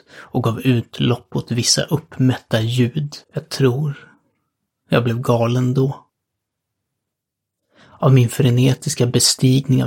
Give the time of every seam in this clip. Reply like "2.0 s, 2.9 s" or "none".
3.2 s